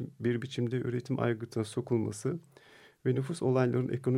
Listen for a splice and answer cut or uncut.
uncut